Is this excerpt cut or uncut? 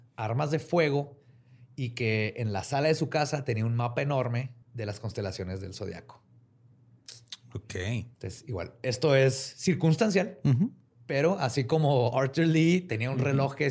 cut